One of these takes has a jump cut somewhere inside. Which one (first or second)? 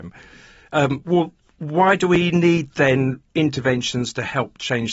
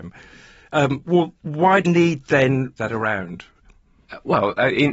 second